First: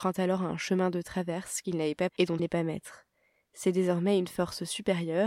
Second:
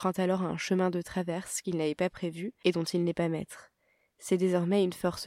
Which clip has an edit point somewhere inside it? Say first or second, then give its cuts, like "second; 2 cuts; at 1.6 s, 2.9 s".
first; 2 cuts; at 2.1 s, 2.4 s